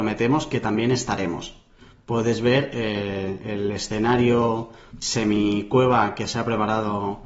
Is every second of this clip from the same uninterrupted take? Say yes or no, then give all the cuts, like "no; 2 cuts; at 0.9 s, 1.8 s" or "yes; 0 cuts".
no; 1 cut; at 4.9 s